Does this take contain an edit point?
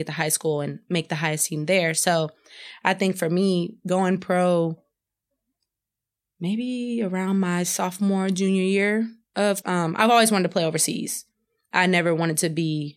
yes; 1 cut; at 9.6 s

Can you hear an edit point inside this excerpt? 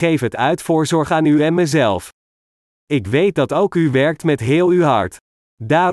no; 0 cuts

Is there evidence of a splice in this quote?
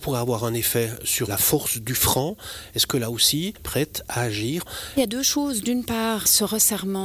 yes; 1 cut; at 3.6 s

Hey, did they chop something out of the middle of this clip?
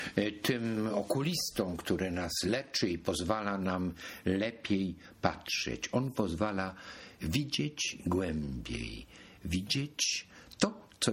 no; 0 cuts

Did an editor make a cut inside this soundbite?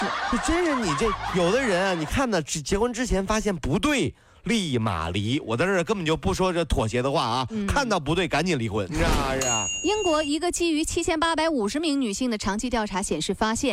no; 0 cuts

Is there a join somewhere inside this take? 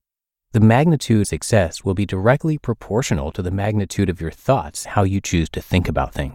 yes; 2 cuts; at 1.2 s, 4.8 s

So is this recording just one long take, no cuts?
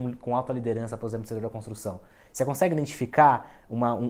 yes; 0 cuts

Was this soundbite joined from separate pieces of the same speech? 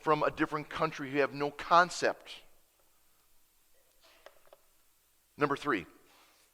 no; 0 cuts

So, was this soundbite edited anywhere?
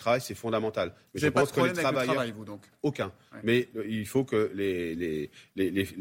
no; 0 cuts

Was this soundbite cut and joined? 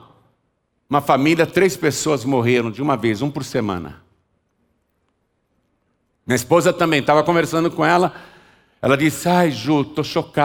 no; 0 cuts

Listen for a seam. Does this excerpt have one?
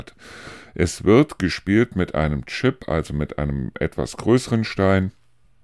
no; 0 cuts

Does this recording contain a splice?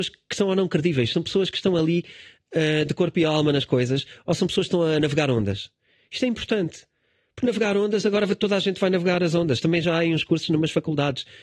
no; 0 cuts

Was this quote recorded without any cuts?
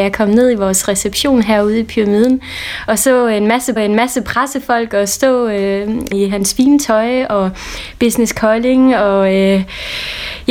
no; 2 cuts; at 3.8 s, 6.1 s

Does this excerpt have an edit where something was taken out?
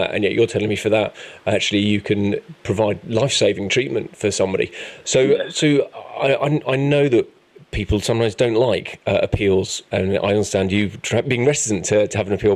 no; 0 cuts

